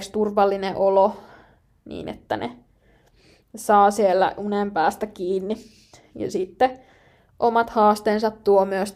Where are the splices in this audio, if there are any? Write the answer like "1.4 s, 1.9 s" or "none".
none